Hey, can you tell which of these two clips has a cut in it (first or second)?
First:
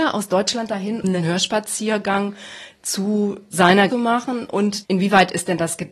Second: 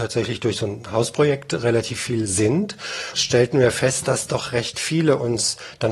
first